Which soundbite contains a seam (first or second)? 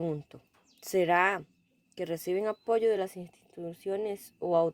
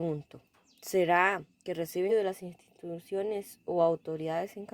second